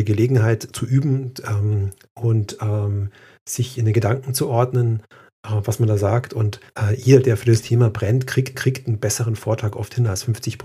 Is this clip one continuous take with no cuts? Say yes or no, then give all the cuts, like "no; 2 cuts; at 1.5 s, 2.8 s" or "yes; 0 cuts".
no; 2 cuts; at 6.7 s, 8.5 s